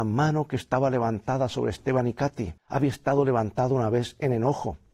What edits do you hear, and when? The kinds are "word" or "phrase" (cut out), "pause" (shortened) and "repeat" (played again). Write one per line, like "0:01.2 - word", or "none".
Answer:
0:02.6 - pause